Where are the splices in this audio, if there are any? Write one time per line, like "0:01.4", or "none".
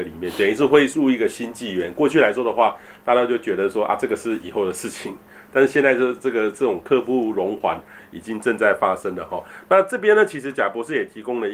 none